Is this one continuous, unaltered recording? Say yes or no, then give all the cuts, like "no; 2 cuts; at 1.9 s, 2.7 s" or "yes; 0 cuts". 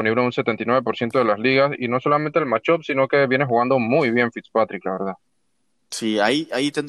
yes; 0 cuts